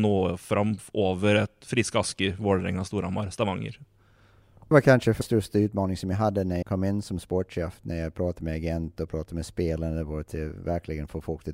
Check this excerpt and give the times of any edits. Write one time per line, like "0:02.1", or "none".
0:04.7
0:05.2
0:06.6

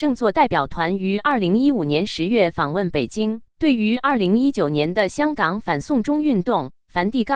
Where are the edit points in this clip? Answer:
0:03.5

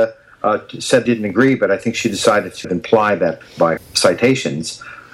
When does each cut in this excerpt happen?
0:01.1
0:02.6
0:03.4
0:03.8

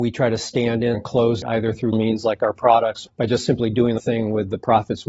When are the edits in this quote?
0:00.9
0:01.4
0:01.9
0:03.1
0:04.0

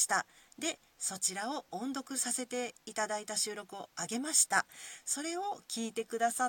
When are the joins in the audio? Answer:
0:02.8

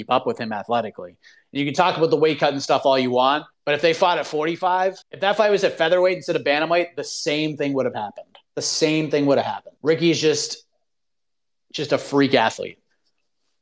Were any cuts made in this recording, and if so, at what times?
0:03.5
0:05.0
0:08.4
0:09.8

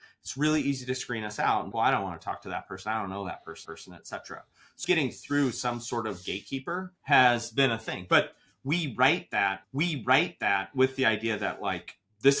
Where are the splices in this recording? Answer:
0:01.7
0:03.7
0:04.8
0:07.0
0:09.6

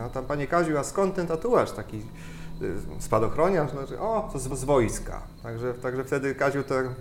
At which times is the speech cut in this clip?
0:04.5

